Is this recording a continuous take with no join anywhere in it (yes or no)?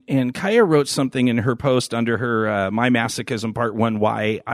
yes